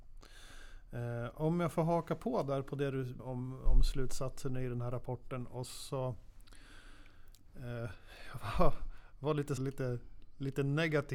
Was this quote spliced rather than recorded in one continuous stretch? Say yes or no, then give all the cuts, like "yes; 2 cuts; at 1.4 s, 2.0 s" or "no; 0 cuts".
yes; 2 cuts; at 3.2 s, 9.6 s